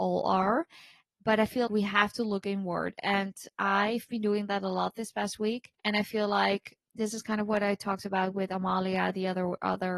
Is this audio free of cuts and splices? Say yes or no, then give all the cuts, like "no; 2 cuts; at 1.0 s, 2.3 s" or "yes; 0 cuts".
no; 2 cuts; at 1.7 s, 5.7 s